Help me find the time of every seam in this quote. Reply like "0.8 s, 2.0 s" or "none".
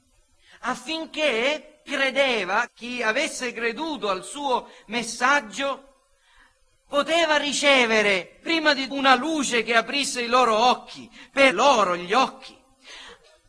1.9 s, 2.7 s, 8.9 s, 11.5 s